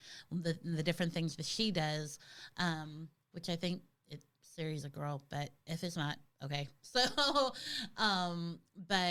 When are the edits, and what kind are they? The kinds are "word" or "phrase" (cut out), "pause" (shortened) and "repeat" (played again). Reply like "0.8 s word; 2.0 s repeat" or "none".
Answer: 4.8 s word